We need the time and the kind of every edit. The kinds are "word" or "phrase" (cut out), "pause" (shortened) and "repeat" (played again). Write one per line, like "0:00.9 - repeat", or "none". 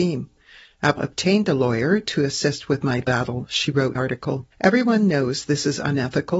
0:01.0 - word
0:03.0 - word
0:04.0 - phrase
0:04.5 - pause